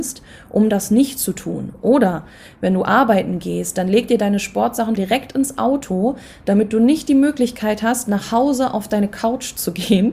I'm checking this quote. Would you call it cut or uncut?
cut